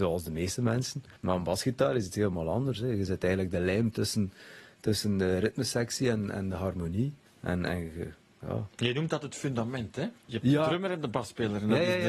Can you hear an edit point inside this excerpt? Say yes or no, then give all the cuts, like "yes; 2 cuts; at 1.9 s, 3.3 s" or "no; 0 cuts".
yes; 3 cuts; at 1.2 s, 7.3 s, 10.2 s